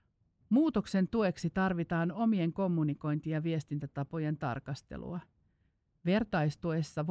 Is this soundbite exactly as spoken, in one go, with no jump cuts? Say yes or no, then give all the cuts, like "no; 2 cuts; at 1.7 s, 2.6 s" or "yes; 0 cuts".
yes; 0 cuts